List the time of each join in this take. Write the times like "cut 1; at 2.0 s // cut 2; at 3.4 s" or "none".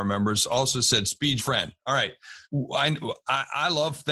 cut 1; at 1.4 s // cut 2; at 2.4 s